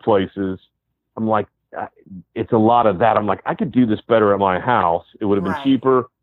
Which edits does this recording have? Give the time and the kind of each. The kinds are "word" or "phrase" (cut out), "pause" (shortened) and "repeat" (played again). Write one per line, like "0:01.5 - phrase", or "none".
none